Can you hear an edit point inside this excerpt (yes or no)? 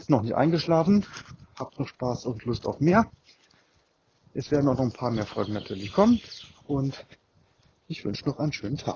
no